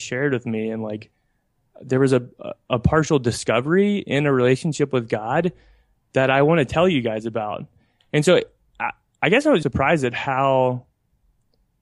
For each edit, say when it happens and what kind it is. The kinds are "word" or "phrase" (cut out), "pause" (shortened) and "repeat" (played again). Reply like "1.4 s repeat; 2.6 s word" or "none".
9.6 s word